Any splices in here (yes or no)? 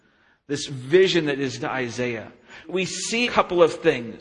yes